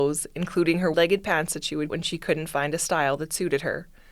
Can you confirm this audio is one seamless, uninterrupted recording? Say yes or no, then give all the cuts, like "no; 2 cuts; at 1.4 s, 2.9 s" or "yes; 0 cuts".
no; 2 cuts; at 0.9 s, 1.9 s